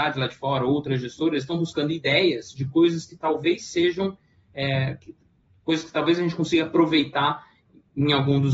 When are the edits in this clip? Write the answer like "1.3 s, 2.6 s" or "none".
none